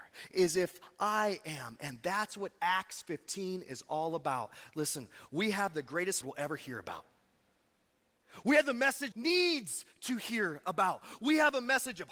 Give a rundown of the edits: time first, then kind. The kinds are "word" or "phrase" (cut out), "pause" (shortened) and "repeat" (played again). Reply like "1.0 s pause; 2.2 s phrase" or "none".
6.2 s phrase; 9.1 s phrase